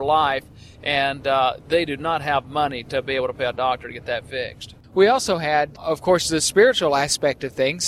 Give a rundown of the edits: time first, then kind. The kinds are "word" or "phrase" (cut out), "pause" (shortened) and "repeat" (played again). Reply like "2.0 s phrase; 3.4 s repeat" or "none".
4.8 s pause